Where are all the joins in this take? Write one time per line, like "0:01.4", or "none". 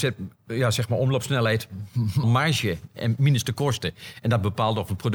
0:02.2